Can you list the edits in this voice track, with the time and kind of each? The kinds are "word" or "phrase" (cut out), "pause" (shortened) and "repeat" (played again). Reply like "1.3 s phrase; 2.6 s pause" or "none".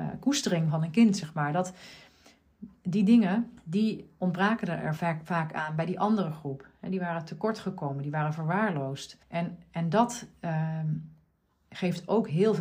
3.6 s pause; 5.0 s word; 9.2 s pause